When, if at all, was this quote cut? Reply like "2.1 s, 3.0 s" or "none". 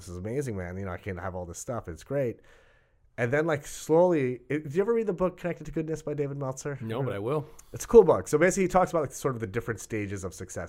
none